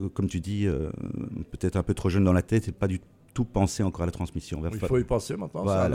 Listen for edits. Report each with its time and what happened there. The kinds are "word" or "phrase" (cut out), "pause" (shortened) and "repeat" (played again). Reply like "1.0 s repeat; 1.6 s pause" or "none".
none